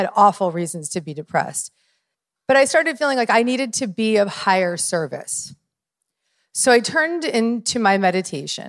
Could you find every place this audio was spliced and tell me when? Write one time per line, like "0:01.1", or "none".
none